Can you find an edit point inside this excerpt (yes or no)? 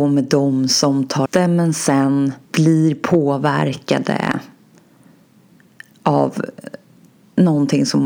yes